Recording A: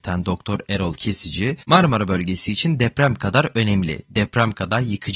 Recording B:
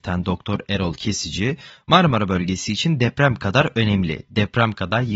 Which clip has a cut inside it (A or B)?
A